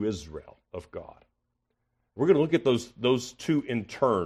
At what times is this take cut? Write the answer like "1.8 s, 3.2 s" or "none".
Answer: none